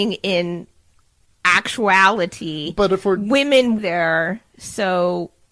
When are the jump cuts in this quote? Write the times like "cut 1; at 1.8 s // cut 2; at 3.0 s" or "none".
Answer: cut 1; at 3.8 s

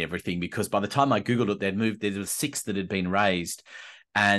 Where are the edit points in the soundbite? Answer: cut 1; at 2.3 s

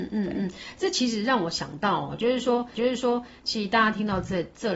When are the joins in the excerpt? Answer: cut 1; at 2.7 s

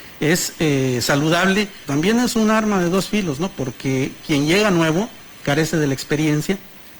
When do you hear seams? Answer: cut 1; at 1.9 s

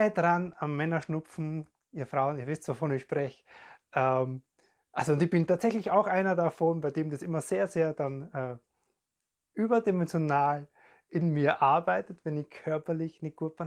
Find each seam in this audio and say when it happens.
none

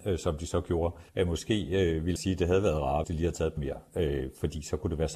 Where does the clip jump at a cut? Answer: cut 1; at 1.1 s // cut 2; at 2.2 s // cut 3; at 3.0 s // cut 4; at 3.6 s

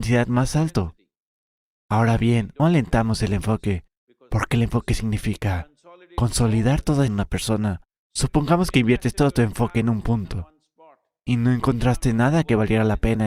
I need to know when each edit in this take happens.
cut 1; at 2.6 s // cut 2; at 7.1 s

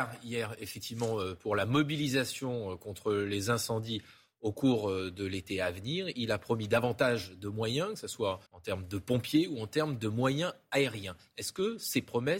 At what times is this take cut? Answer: cut 1; at 8.5 s

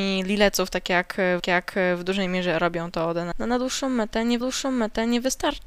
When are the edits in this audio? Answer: cut 1; at 1.4 s // cut 2; at 3.3 s // cut 3; at 4.4 s

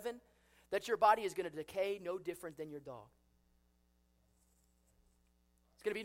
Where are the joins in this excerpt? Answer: none

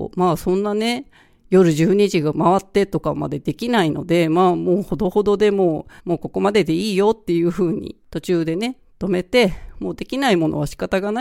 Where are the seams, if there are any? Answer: cut 1; at 6.0 s // cut 2; at 8.0 s

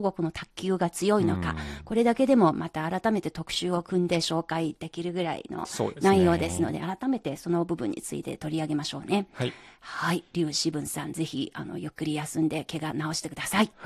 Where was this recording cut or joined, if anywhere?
none

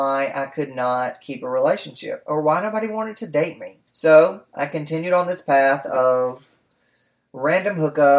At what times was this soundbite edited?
cut 1; at 3.9 s

